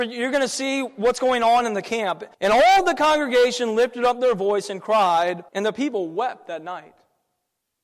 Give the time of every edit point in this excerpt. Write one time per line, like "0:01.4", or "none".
0:02.3
0:05.5